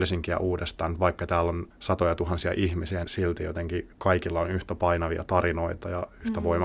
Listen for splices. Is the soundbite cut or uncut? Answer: cut